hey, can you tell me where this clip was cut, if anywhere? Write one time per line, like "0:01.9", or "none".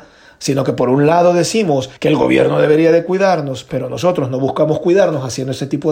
0:02.0

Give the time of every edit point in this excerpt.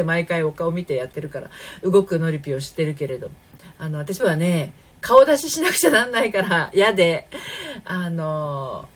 0:04.2
0:04.9

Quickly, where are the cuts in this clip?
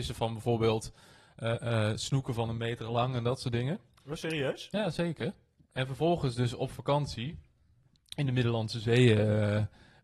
none

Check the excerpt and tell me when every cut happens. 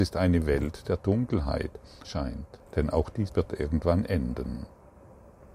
0:02.0
0:02.7
0:03.3

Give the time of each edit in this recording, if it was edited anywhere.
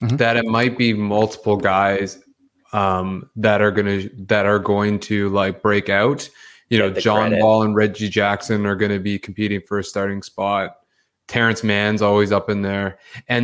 none

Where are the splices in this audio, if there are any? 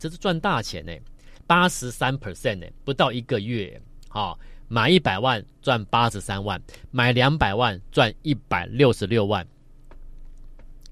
0:01.4

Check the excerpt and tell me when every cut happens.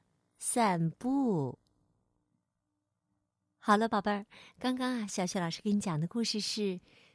none

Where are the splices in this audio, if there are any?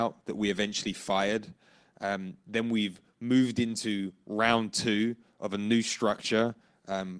none

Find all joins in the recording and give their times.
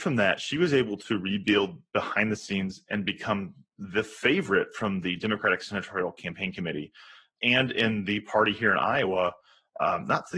none

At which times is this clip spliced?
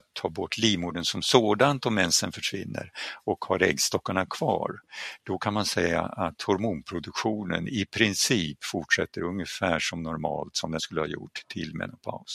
0:10.8

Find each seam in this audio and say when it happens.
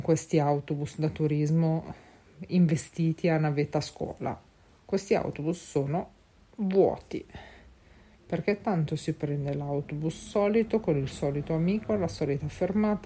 none

